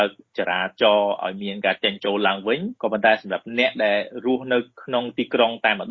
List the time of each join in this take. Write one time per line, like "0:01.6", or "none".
0:02.8